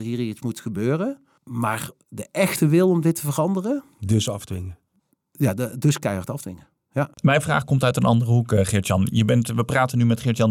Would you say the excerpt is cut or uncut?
cut